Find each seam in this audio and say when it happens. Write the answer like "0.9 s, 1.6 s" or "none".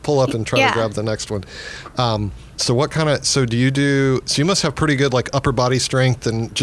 2.5 s